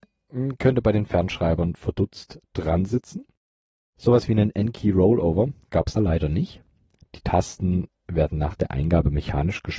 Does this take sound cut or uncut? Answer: cut